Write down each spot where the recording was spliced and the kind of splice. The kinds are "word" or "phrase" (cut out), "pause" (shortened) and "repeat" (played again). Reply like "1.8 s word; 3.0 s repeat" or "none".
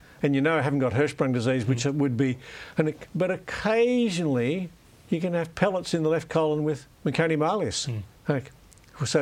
4.9 s pause; 6.9 s pause; 8.2 s pause